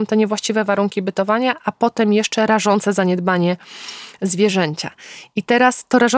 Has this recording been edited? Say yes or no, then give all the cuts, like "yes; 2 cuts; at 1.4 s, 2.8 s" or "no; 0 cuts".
no; 0 cuts